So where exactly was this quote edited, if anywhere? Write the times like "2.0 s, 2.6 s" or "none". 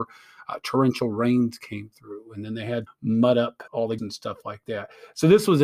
2.9 s, 3.7 s, 4.0 s